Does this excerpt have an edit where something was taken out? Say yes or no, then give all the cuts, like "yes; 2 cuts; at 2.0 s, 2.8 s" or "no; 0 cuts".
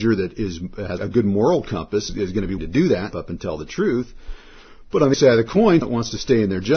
yes; 6 cuts; at 1.0 s, 2.1 s, 2.6 s, 3.1 s, 5.1 s, 5.8 s